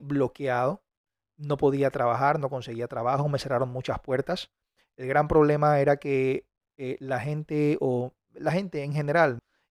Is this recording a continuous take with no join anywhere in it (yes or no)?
yes